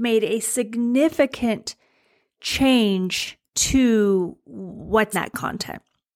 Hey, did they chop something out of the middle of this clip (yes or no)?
yes